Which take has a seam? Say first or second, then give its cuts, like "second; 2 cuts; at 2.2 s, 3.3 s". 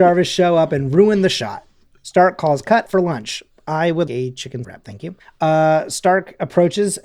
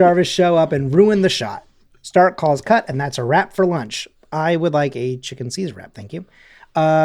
first; 4 cuts; at 2.9 s, 4.1 s, 4.6 s, 5.2 s